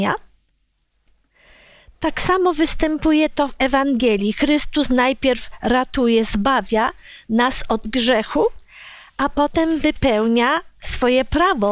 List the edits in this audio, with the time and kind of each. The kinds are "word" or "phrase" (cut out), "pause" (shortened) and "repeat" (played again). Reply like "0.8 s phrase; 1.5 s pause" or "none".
none